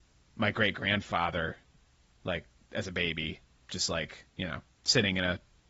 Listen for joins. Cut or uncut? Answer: uncut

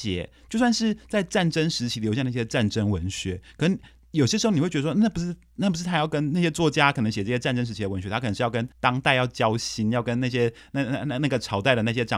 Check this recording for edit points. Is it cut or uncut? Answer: cut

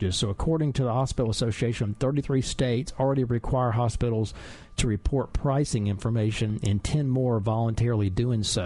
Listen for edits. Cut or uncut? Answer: uncut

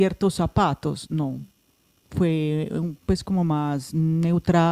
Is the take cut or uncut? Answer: uncut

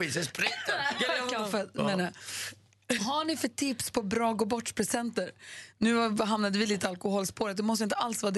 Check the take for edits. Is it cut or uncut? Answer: cut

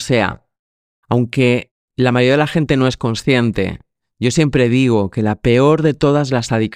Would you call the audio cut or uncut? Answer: uncut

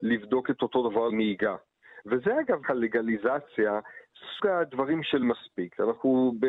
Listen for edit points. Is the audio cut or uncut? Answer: cut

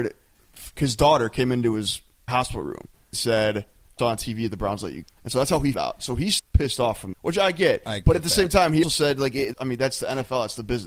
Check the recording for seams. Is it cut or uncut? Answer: cut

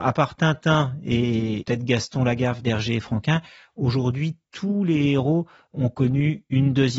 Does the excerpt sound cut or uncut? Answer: uncut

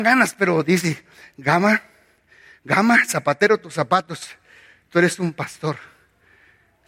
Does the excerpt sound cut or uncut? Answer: uncut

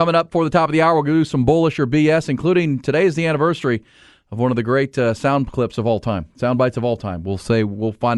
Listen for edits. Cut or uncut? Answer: uncut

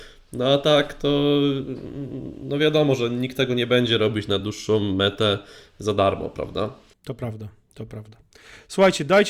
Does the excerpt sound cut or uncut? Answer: uncut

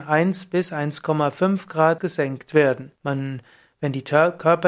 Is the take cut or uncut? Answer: cut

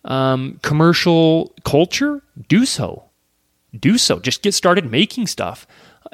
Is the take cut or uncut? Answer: uncut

